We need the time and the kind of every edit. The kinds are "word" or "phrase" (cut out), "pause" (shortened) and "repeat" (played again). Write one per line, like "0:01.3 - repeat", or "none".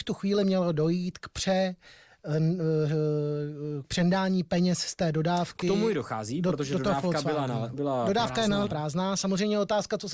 0:03.8 - word
0:07.7 - word
0:08.7 - word